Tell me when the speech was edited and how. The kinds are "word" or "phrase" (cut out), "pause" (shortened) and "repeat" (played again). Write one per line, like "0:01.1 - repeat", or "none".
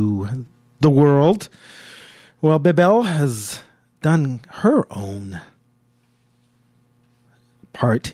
none